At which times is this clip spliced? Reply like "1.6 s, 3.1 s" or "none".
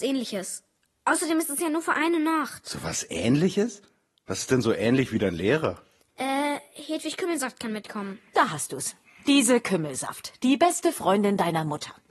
none